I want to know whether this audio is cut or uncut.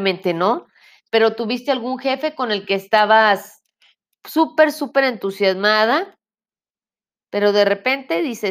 uncut